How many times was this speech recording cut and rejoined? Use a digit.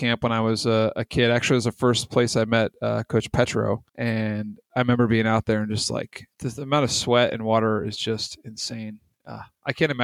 2